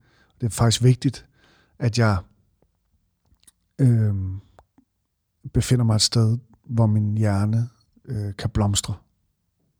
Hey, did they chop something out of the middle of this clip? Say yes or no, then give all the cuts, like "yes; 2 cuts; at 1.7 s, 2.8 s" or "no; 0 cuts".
no; 0 cuts